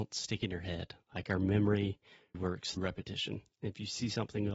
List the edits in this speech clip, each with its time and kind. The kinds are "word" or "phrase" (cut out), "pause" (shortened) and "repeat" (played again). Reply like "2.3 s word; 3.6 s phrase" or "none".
2.3 s word; 2.8 s word